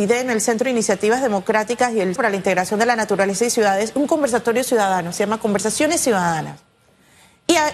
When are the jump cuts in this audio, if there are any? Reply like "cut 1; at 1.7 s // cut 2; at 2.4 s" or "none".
cut 1; at 2.2 s